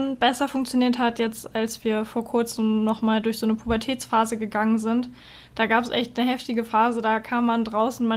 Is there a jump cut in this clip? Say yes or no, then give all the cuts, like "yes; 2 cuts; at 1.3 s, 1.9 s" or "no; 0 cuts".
no; 0 cuts